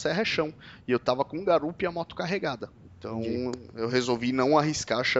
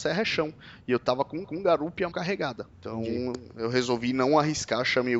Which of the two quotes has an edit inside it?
second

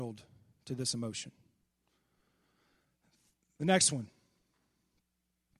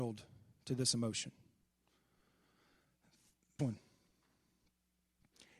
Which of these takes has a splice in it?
second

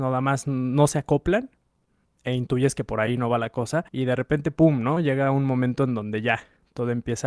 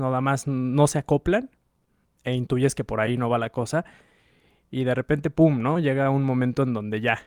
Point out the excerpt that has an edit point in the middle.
first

